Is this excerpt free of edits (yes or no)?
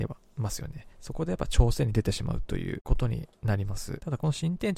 no